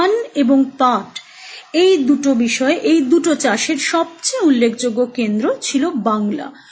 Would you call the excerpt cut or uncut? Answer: uncut